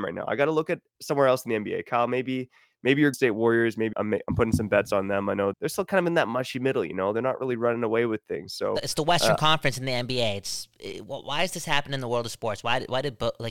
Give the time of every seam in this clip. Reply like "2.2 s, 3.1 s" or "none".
3.1 s, 3.9 s, 5.5 s